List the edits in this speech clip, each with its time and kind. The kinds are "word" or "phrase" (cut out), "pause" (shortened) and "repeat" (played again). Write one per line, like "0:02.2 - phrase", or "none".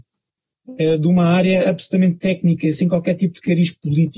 none